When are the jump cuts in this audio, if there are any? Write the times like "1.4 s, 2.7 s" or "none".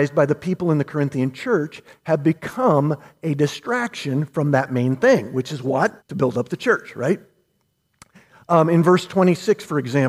6.0 s